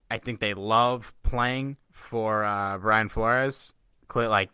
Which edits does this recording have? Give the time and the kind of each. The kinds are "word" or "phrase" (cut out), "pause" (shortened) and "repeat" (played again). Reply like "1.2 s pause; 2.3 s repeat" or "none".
1.8 s pause